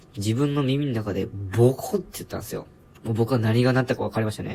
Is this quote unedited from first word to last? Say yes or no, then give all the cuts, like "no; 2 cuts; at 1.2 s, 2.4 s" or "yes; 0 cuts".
no; 1 cut; at 2.8 s